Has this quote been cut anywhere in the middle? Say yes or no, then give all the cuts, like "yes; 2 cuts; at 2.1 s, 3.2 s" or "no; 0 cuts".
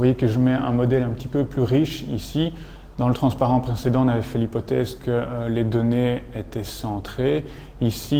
no; 0 cuts